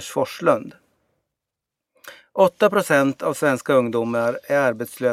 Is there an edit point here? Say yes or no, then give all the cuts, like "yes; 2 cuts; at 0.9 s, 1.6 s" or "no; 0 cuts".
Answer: no; 0 cuts